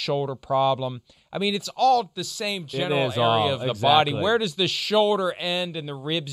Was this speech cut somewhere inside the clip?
no; 0 cuts

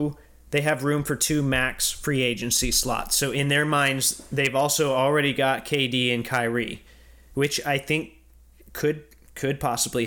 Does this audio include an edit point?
no; 0 cuts

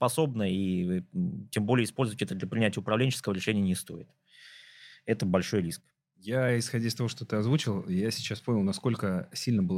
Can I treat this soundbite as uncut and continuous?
yes; 0 cuts

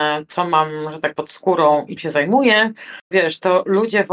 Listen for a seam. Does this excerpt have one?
yes; 3 cuts; at 1.1 s, 2.0 s, 3.1 s

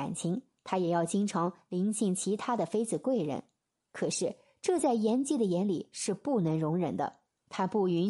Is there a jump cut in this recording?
no; 0 cuts

